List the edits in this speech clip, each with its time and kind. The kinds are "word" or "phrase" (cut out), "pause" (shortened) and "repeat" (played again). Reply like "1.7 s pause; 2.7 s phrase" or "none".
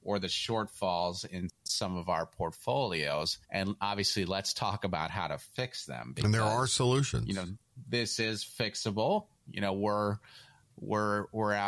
3.4 s pause